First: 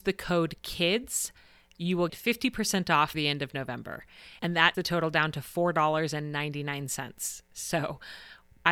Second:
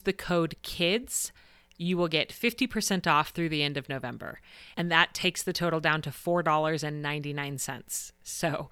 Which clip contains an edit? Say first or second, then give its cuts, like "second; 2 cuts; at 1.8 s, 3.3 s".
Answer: first; 3 cuts; at 2.1 s, 3.1 s, 4.7 s